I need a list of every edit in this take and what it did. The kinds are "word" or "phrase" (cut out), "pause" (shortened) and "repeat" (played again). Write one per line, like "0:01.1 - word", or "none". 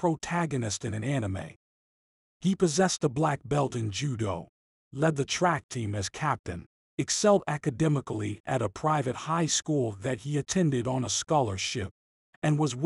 none